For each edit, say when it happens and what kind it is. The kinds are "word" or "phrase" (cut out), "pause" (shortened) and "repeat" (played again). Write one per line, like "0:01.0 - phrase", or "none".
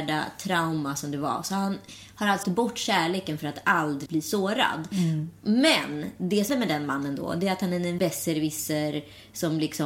0:02.4 - word
0:04.1 - word
0:06.5 - word
0:08.0 - word